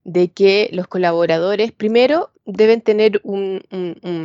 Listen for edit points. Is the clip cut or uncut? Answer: cut